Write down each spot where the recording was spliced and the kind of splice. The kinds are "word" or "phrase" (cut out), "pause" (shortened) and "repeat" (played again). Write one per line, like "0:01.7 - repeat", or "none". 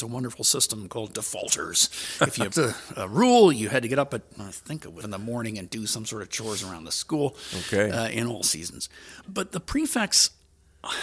0:02.5 - word
0:04.4 - word
0:05.0 - phrase
0:09.2 - word